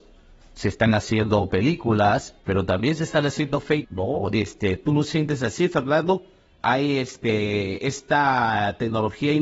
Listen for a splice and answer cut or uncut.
cut